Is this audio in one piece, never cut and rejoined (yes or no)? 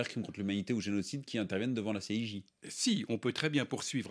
yes